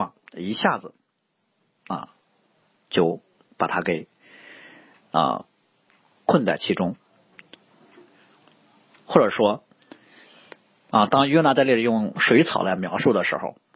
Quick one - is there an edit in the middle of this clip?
no; 0 cuts

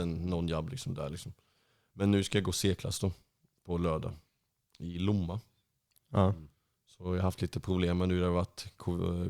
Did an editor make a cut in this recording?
no; 0 cuts

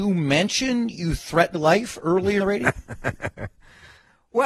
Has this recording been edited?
yes; 2 cuts; at 1.5 s, 2.4 s

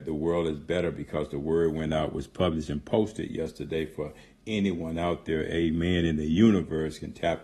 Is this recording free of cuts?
yes; 0 cuts

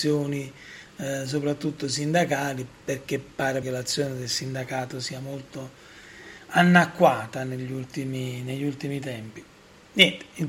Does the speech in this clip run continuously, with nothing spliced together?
no; 1 cut; at 3.6 s

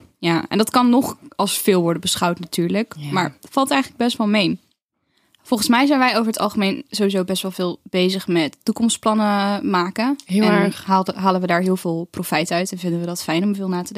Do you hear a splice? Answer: no; 0 cuts

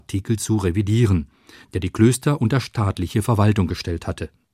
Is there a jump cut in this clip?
no; 0 cuts

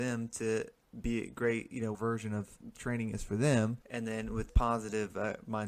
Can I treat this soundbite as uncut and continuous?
no; 3 cuts; at 1.9 s, 3.8 s, 4.5 s

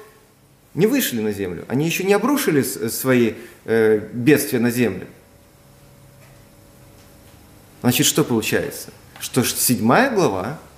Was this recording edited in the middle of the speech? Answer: no; 0 cuts

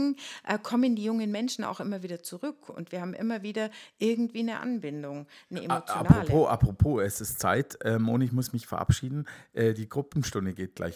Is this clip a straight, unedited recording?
yes; 0 cuts

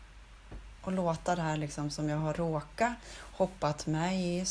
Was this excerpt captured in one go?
yes; 0 cuts

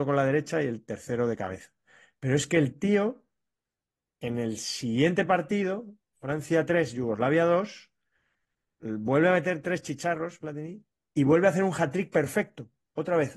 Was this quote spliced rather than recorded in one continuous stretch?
no; 0 cuts

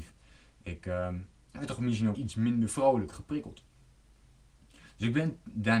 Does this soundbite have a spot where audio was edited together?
yes; 2 cuts; at 2.1 s, 3.1 s

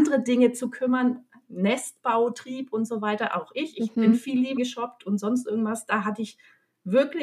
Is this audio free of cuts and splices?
no; 1 cut; at 4.6 s

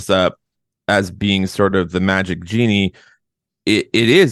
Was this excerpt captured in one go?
yes; 0 cuts

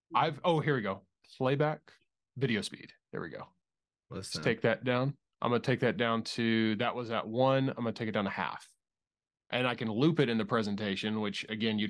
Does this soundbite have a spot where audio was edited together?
no; 0 cuts

